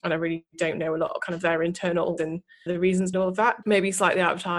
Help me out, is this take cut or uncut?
cut